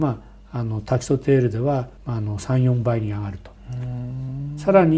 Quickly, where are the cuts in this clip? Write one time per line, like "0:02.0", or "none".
0:02.0

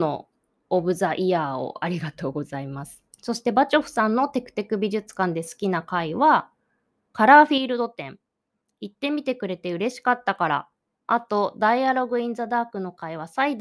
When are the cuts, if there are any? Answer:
0:03.1

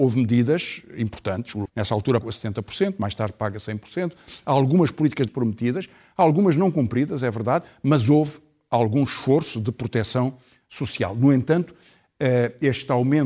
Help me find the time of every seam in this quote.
0:01.6
0:02.2
0:05.3

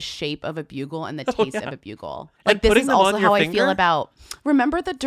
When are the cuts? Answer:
0:02.4

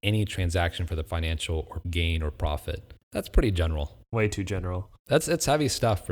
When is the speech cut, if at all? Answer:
0:01.1
0:01.8
0:03.0
0:04.0
0:05.0

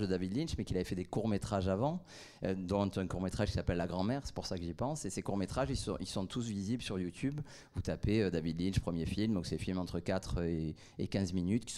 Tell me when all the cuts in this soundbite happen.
none

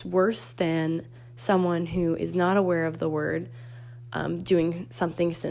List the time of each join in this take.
none

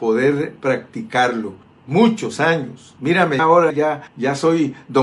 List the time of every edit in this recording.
0:01.6
0:03.4
0:03.7
0:04.1

